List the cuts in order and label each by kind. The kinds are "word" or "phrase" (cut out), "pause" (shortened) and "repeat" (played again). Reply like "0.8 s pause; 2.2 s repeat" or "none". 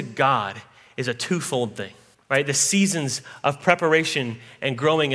2.1 s pause